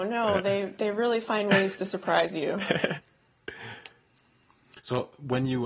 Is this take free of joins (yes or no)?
yes